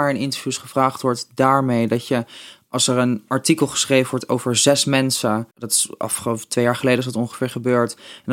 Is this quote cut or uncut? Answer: cut